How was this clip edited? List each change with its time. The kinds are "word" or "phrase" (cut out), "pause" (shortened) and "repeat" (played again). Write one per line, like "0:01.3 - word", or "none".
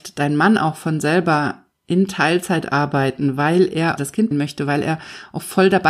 0:04.0 - phrase
0:04.3 - word